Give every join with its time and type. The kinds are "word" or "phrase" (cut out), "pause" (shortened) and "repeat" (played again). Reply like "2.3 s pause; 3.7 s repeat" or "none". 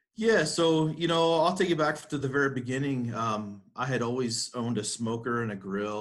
none